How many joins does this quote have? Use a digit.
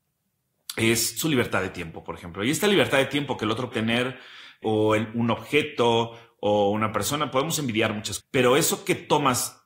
3